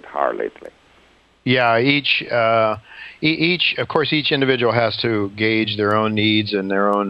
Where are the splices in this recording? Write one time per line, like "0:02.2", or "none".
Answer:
none